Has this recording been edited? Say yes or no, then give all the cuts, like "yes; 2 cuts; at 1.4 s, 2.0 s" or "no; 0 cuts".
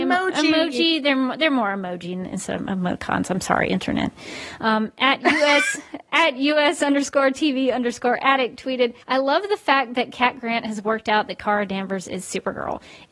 yes; 2 cuts; at 6.1 s, 9.0 s